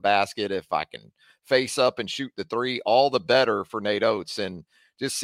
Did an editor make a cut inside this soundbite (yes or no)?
no